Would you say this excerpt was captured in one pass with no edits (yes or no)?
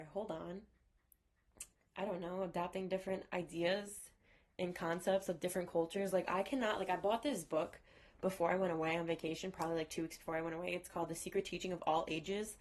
yes